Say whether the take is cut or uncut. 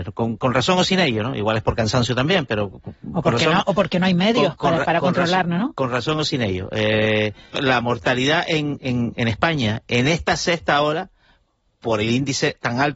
cut